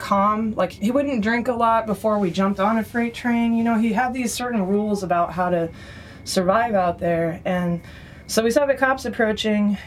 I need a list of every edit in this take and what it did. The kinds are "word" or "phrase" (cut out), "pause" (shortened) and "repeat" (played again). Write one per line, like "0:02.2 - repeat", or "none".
none